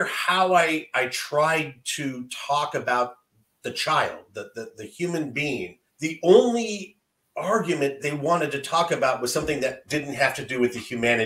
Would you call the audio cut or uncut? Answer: cut